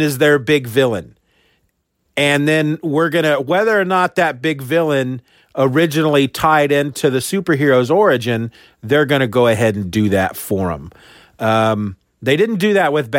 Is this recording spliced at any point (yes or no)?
no